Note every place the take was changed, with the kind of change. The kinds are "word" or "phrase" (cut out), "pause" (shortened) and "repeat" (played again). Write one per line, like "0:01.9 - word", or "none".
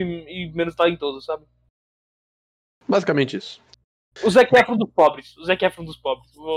none